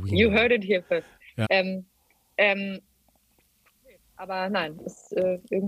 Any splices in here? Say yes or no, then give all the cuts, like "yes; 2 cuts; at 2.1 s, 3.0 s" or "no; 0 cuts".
yes; 1 cut; at 1.4 s